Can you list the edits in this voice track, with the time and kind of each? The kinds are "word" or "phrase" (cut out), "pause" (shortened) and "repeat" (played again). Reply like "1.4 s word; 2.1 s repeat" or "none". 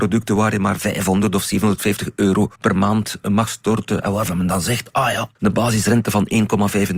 2.6 s pause; 5.4 s pause

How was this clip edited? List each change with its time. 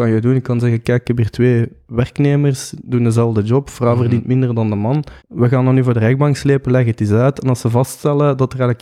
5.2 s pause

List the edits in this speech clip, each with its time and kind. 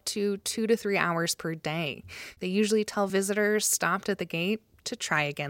none

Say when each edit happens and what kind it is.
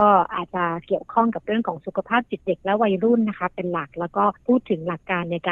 4.4 s pause

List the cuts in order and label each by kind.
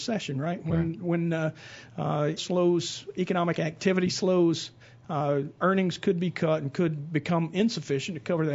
2.4 s phrase

